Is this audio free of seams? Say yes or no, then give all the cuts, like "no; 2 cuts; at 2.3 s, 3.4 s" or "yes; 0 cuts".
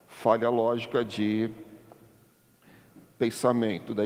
no; 1 cut; at 3.0 s